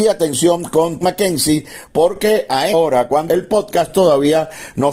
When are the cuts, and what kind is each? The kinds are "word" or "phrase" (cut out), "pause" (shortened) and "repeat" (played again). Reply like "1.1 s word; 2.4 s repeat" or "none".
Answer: 1.0 s word; 2.7 s word; 3.3 s phrase